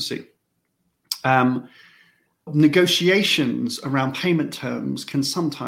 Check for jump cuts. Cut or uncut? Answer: cut